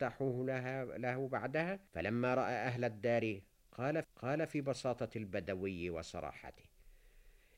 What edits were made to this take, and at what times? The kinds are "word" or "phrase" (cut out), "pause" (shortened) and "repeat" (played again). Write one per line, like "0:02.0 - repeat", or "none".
0:01.9 - pause
0:04.0 - repeat